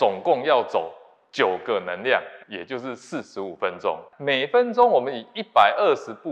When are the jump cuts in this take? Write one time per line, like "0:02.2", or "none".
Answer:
0:02.4
0:04.1